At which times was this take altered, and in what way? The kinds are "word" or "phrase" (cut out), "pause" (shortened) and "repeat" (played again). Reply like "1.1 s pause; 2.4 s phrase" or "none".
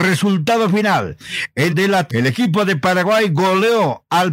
1.7 s phrase; 2.1 s word